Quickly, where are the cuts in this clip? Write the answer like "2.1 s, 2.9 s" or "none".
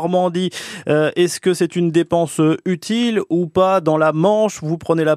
none